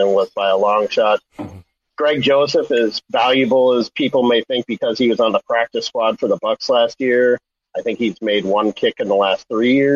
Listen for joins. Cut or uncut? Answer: uncut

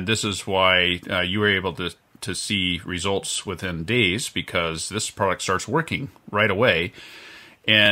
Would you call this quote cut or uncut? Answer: uncut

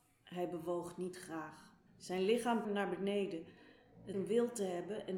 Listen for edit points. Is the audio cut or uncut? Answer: cut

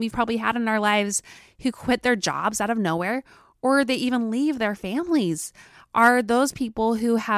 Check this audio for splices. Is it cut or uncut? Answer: uncut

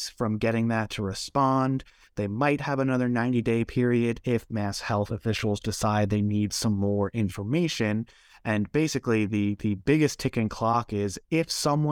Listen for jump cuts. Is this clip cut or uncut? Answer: uncut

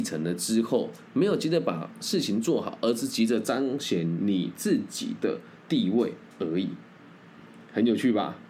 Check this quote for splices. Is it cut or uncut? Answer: cut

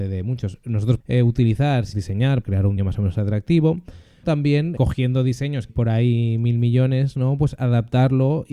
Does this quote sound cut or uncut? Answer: cut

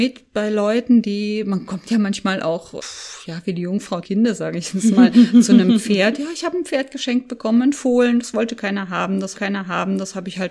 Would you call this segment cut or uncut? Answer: cut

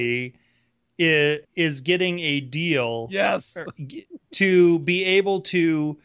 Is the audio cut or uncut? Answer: cut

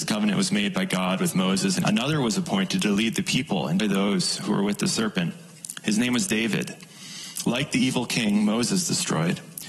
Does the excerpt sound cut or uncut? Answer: cut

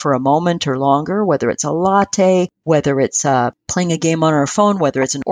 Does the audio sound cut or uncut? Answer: uncut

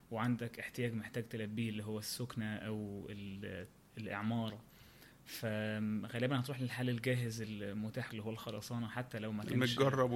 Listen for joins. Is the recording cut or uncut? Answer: cut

